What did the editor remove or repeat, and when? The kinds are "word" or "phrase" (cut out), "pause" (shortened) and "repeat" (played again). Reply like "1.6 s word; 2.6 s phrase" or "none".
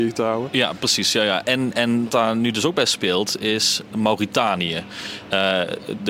2.1 s word